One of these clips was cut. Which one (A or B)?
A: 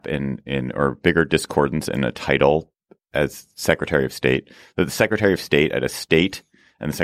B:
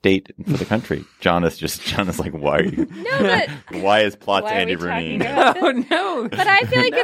B